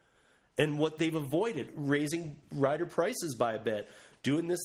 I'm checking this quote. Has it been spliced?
yes; 1 cut; at 1.7 s

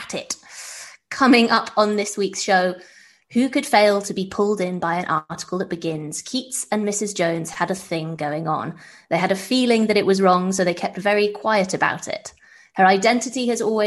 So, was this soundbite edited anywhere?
no; 0 cuts

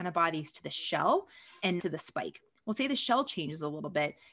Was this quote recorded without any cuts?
no; 1 cut; at 1.8 s

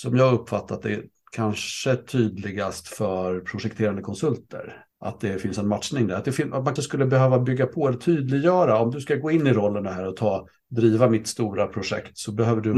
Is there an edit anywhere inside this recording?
yes; 1 cut; at 6.8 s

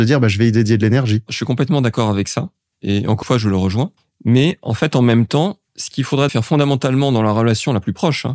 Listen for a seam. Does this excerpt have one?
yes; 4 cuts; at 3.2 s, 4.0 s, 5.7 s, 6.3 s

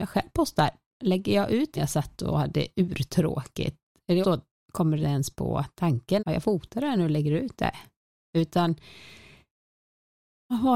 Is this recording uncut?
no; 4 cuts; at 1.8 s, 4.2 s, 5.0 s, 6.2 s

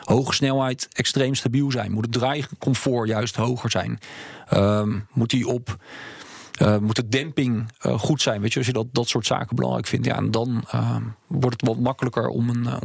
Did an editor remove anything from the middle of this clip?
no; 0 cuts

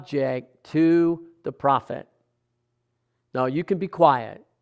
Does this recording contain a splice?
no; 0 cuts

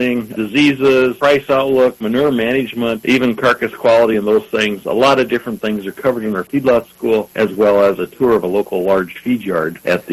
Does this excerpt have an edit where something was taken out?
no; 0 cuts

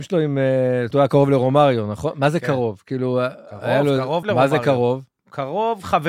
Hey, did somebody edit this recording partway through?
yes; 2 cuts; at 0.9 s, 4.2 s

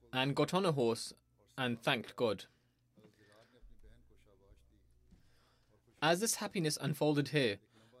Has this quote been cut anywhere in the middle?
no; 0 cuts

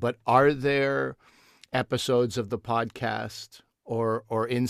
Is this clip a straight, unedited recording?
yes; 0 cuts

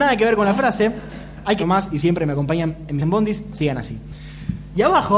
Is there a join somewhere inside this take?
yes; 2 cuts; at 1.6 s, 3.0 s

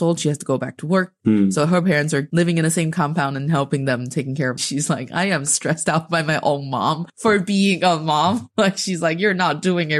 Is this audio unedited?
no; 3 cuts; at 4.6 s, 5.5 s, 7.1 s

